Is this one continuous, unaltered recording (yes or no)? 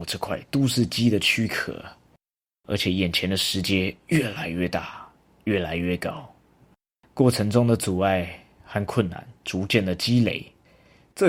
yes